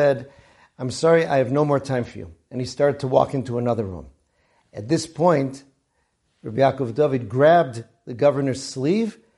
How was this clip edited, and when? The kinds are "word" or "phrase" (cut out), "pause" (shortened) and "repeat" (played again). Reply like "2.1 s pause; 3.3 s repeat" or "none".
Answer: none